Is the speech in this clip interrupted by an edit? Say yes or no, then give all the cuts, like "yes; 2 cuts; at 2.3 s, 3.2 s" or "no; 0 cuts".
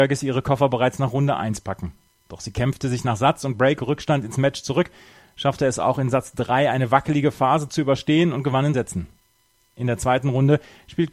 yes; 1 cut; at 8.7 s